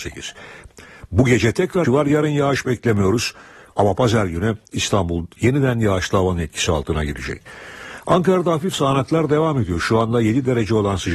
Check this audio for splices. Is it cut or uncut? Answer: cut